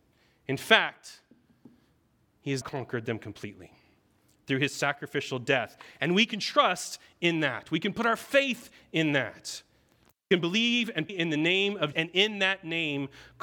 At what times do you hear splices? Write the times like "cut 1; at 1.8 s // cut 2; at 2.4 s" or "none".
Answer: cut 1; at 2.6 s // cut 2; at 11.1 s // cut 3; at 11.9 s